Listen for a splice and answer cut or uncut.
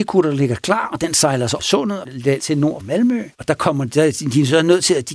cut